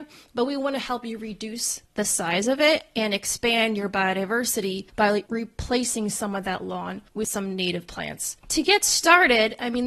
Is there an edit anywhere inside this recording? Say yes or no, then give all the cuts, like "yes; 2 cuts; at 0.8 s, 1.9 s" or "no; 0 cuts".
yes; 1 cut; at 1.8 s